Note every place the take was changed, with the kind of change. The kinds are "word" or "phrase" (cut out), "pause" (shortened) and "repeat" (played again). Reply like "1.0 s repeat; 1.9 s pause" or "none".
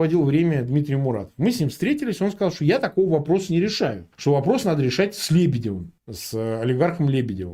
4.1 s pause; 6.0 s pause